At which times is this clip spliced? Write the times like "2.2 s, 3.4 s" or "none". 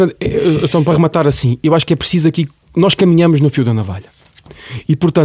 2.6 s